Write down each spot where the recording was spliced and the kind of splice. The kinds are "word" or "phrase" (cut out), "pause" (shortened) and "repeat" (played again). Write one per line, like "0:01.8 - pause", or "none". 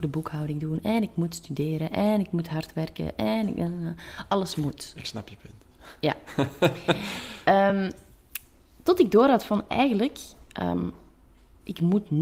none

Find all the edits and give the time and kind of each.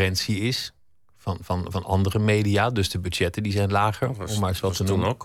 none

